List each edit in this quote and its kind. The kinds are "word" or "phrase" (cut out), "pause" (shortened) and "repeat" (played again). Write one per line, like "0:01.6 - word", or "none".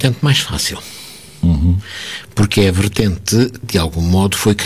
0:03.6 - word